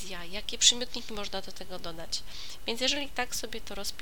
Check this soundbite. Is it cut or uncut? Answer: uncut